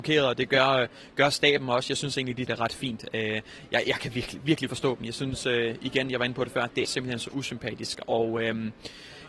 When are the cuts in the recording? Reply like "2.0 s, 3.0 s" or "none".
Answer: 2.5 s, 4.7 s, 6.8 s